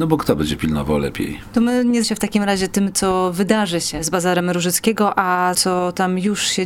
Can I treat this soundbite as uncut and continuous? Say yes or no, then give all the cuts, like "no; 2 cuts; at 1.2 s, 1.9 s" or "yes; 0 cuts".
no; 2 cuts; at 2.0 s, 5.5 s